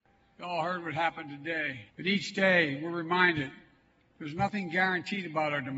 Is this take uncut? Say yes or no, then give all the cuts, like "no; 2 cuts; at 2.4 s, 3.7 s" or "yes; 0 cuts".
no; 1 cut; at 1.9 s